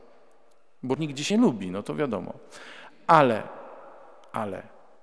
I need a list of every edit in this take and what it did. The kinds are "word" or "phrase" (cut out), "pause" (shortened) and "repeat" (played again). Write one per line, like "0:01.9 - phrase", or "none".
0:01.0 - word
0:01.3 - word